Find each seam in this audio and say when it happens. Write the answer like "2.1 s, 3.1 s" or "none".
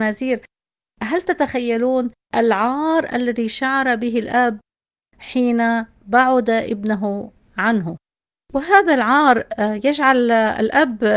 none